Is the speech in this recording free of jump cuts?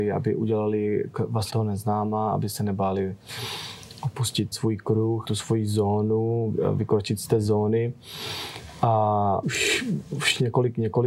no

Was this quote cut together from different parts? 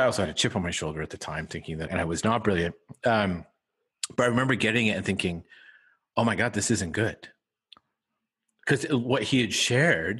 yes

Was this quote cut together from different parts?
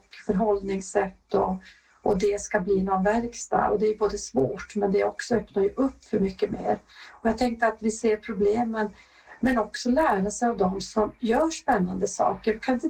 no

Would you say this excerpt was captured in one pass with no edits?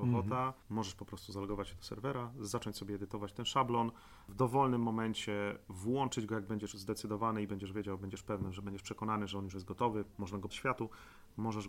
no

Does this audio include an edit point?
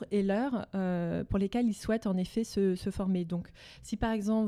no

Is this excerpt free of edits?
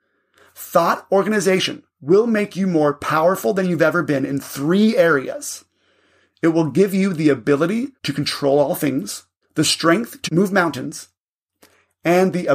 no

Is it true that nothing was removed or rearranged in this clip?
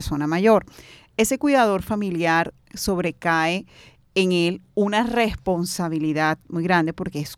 yes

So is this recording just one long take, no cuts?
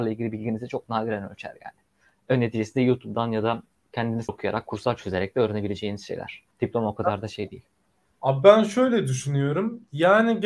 no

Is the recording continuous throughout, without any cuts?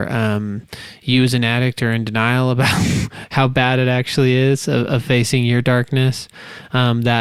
yes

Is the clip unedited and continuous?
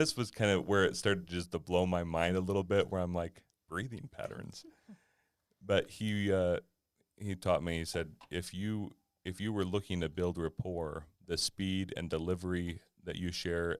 no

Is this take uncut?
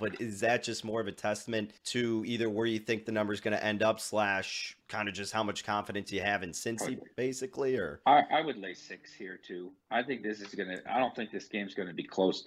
no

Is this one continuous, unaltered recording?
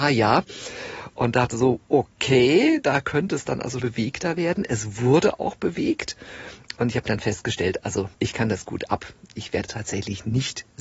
no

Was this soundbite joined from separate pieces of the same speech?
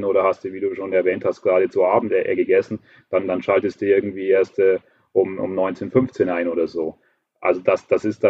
no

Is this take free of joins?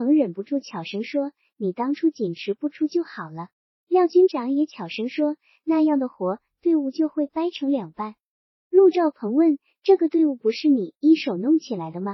no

